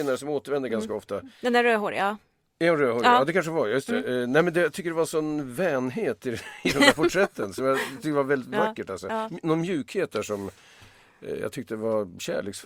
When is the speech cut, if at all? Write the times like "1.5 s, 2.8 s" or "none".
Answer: none